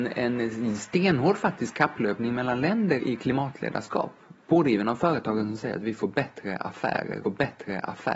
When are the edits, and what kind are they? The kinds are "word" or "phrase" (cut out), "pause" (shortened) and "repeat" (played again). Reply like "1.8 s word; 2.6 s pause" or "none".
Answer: 3.0 s word; 7.2 s repeat